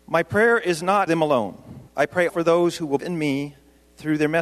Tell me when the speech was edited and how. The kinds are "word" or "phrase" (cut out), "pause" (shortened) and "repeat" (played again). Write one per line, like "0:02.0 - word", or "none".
0:01.1 - word
0:01.9 - pause
0:02.3 - word
0:03.0 - word